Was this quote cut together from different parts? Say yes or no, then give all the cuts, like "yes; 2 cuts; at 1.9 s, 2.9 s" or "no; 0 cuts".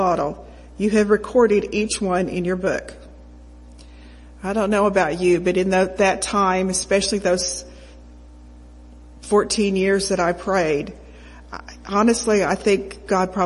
no; 0 cuts